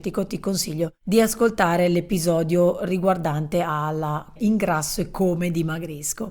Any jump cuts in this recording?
yes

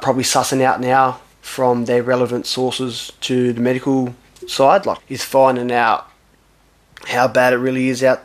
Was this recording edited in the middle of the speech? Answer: yes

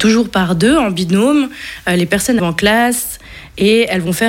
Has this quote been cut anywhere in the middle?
yes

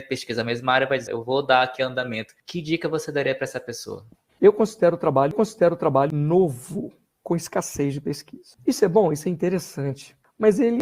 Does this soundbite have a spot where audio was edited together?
yes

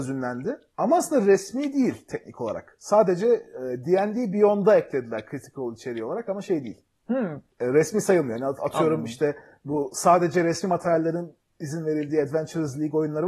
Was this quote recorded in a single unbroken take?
yes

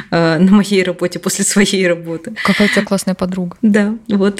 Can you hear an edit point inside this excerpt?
no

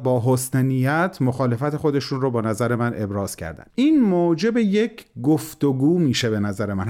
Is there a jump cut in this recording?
yes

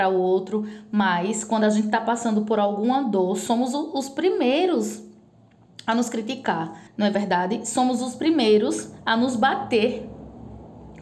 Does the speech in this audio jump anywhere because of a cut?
yes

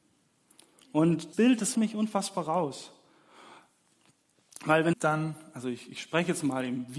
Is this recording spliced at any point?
yes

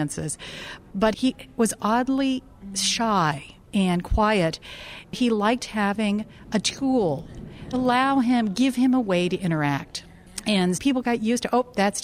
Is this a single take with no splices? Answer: no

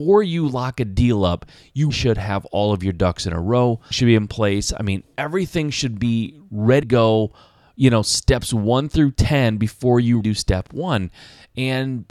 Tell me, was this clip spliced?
yes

